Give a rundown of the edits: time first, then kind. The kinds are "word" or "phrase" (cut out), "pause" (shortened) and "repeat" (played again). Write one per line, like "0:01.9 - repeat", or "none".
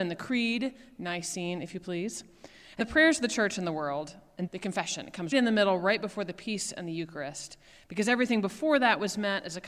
0:02.8 - word
0:04.5 - word
0:05.3 - word